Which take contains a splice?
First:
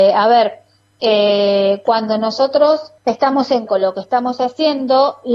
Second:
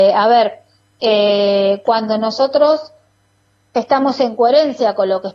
first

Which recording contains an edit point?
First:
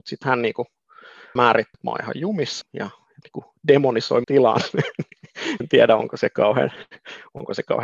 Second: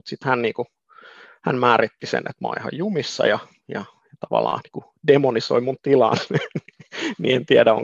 first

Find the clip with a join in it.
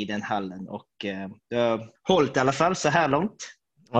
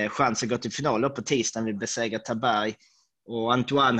first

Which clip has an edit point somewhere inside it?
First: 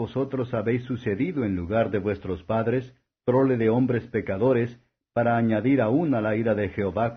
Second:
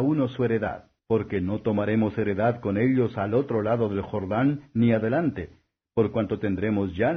second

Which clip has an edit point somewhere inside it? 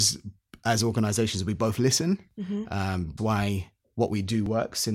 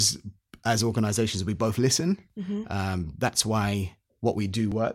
first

